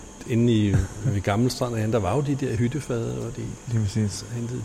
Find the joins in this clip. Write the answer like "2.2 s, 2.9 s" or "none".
none